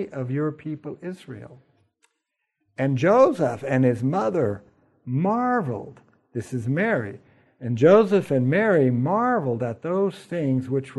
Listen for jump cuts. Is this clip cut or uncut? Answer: uncut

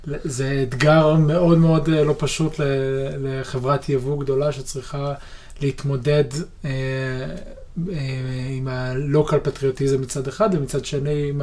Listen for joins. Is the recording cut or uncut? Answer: uncut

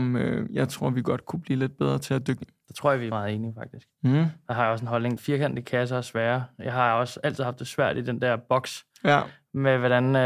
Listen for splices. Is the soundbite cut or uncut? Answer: cut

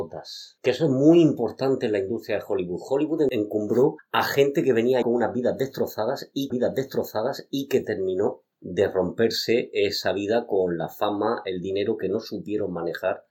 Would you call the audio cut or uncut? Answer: cut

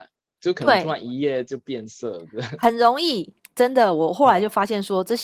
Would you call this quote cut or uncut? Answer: cut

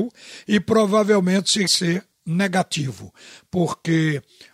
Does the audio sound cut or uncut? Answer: cut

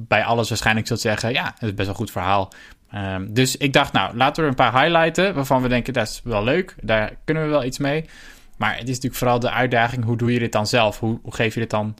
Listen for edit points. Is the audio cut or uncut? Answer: uncut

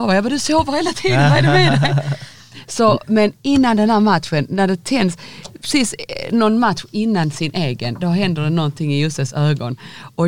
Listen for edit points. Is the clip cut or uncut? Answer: uncut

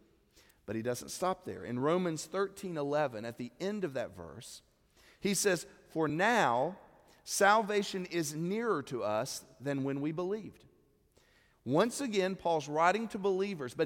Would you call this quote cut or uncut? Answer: uncut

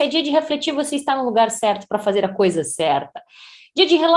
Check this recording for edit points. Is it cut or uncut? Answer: uncut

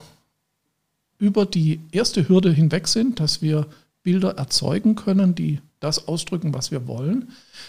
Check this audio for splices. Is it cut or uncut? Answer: uncut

